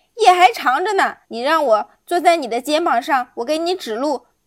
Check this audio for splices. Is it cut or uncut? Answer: cut